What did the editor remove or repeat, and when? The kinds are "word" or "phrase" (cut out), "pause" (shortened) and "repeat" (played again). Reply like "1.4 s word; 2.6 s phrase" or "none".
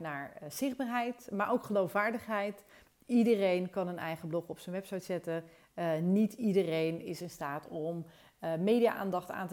none